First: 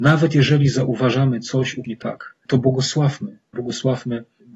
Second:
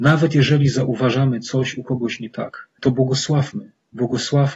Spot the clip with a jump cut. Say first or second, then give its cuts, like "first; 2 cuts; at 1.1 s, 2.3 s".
first; 2 cuts; at 1.8 s, 3.5 s